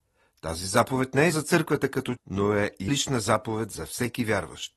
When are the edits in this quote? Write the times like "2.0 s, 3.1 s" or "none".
1.3 s, 2.2 s, 2.9 s